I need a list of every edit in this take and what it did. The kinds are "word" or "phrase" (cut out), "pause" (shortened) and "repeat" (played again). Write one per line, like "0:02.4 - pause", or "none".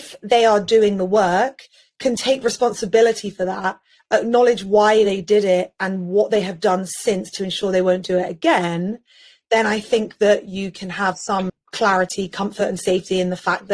none

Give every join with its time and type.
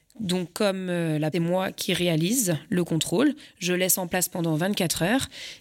0:01.3 - phrase

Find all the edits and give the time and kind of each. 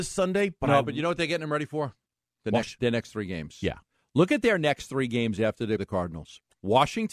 0:02.8 - word
0:05.8 - word

